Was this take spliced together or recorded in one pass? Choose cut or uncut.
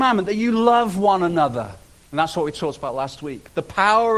cut